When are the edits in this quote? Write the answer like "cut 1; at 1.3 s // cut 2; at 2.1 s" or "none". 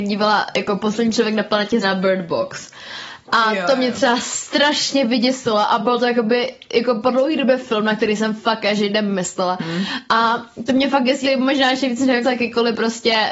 cut 1; at 1.8 s // cut 2; at 11.2 s // cut 3; at 12.2 s